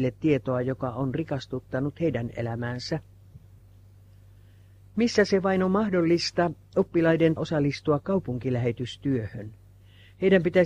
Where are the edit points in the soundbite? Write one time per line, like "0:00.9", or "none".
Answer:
0:07.4

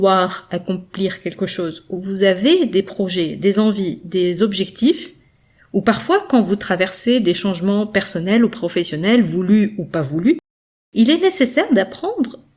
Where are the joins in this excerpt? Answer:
none

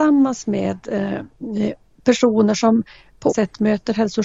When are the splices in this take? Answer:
0:03.3

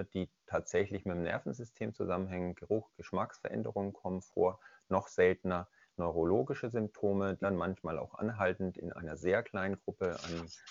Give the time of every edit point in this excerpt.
0:07.4

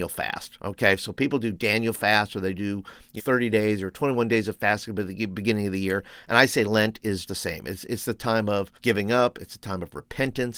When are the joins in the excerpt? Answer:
0:03.2
0:07.3
0:08.8

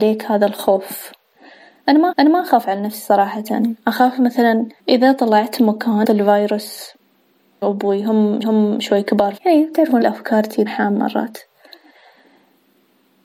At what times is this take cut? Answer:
0:02.1
0:04.8
0:06.0
0:07.6
0:08.4
0:09.4
0:10.0
0:10.7

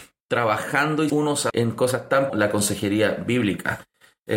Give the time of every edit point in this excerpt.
0:01.1
0:01.5
0:02.3

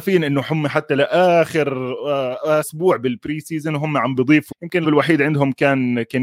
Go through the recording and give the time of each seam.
0:02.6
0:04.5
0:04.8

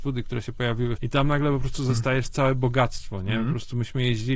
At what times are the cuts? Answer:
0:01.0

